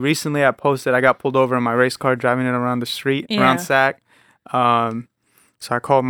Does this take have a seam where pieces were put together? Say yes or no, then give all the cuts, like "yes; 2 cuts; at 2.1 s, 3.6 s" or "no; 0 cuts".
no; 0 cuts